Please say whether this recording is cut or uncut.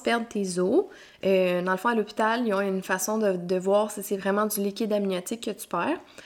uncut